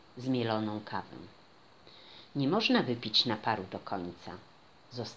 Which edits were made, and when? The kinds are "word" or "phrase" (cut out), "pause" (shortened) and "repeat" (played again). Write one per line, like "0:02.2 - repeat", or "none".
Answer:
none